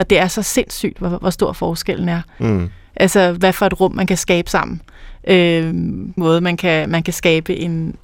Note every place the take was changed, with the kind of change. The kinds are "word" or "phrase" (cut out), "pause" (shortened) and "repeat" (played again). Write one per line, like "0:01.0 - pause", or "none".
0:06.2 - phrase